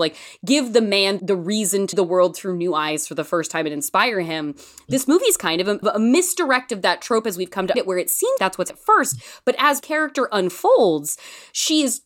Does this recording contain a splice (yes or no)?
yes